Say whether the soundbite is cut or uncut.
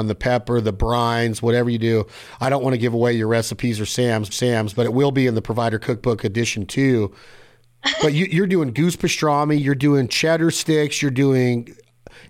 cut